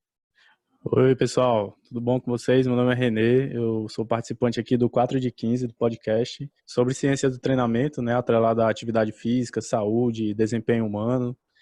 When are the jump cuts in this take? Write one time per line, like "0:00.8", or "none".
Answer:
0:06.6

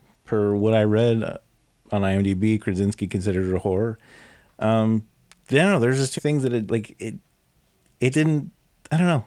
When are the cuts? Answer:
0:06.2
0:06.7
0:08.1

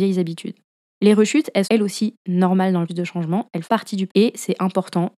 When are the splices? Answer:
0:01.6
0:02.9
0:03.6
0:04.1

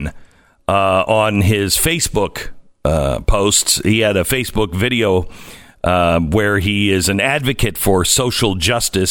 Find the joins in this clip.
none

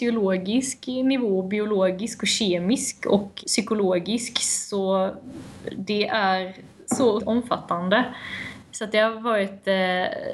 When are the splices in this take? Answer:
0:03.4
0:07.2

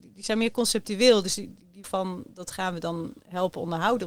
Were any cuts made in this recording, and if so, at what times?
0:01.8

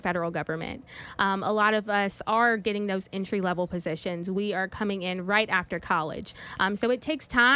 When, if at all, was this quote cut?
none

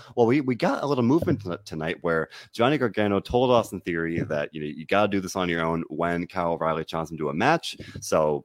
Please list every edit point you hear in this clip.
none

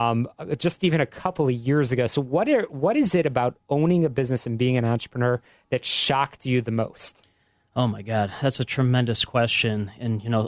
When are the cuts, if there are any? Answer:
none

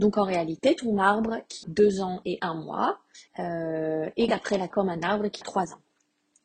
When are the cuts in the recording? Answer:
0:01.6
0:03.3
0:04.3
0:04.7
0:05.4

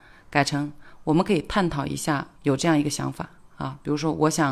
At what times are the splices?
0:02.4

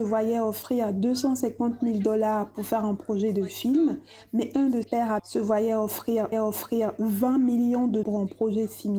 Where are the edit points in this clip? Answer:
0:04.8
0:05.2
0:06.3
0:08.0

